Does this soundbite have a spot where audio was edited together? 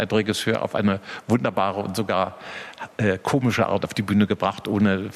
no; 0 cuts

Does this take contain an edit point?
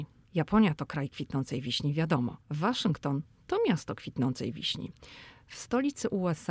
yes; 1 cut; at 2.4 s

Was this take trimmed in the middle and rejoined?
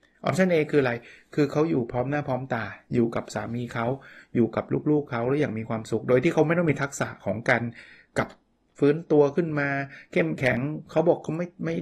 no; 0 cuts

